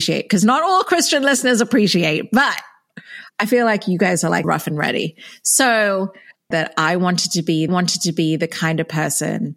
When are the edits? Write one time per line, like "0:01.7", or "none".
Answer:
0:04.4
0:06.5
0:07.7